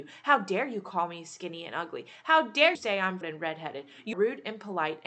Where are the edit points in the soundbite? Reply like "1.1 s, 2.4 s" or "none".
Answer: 2.7 s, 3.2 s, 4.1 s